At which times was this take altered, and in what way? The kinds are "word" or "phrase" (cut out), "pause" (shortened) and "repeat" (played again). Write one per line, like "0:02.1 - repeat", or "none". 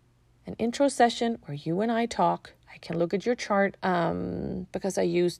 0:02.6 - pause
0:03.8 - pause